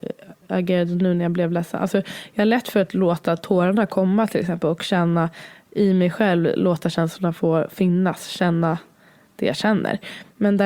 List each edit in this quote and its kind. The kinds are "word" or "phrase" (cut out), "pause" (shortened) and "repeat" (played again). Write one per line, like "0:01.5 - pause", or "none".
none